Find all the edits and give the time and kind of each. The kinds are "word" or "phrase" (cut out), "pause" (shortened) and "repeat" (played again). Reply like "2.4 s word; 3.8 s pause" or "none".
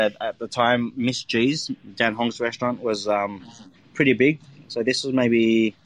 none